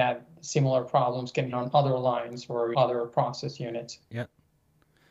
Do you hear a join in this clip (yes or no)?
yes